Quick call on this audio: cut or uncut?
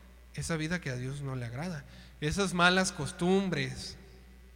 uncut